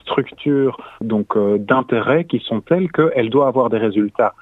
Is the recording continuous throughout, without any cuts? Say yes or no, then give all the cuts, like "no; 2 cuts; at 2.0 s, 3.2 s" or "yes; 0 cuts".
no; 1 cut; at 0.9 s